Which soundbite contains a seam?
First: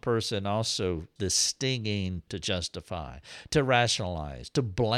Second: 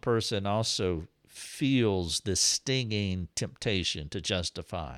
first; 2 cuts; at 1.2 s, 2.3 s

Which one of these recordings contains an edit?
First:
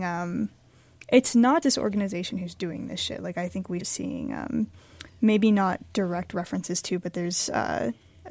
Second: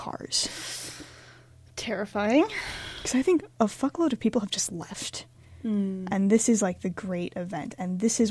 first; 2 cuts; at 1.6 s, 3.8 s

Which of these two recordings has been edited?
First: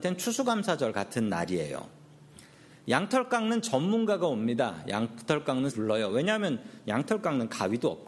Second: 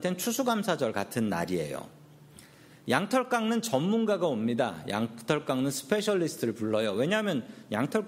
first; 1 cut; at 5.7 s

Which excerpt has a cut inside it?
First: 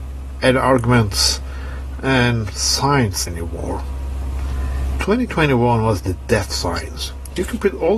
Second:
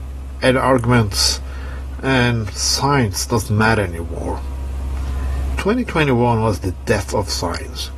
first; 2 cuts; at 3.3 s, 6.5 s

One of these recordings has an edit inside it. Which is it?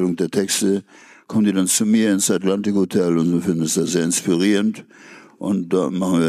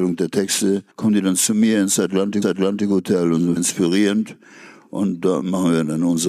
second; 3 cuts; at 0.9 s, 2.4 s, 3.6 s

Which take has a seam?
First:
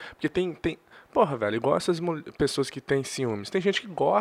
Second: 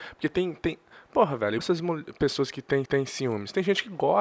second; 2 cuts; at 1.6 s, 2.9 s

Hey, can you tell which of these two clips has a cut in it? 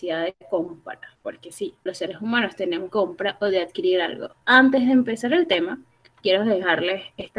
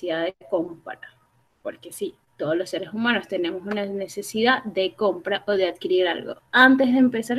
first; 3 cuts; at 1.1 s, 1.9 s, 2.9 s

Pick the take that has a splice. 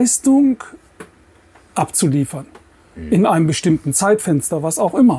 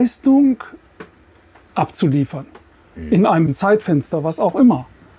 second; 1 cut; at 3.5 s

